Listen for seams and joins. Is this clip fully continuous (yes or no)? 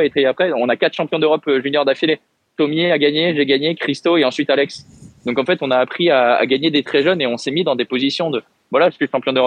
yes